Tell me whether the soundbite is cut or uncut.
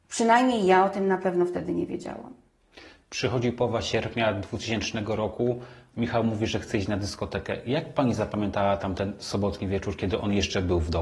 uncut